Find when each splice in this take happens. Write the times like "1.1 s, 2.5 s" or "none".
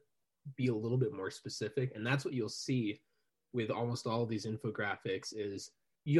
none